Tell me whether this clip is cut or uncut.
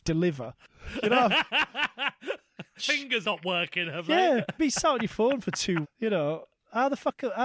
cut